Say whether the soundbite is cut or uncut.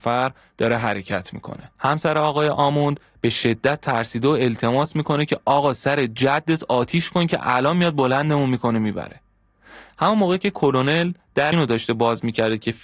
cut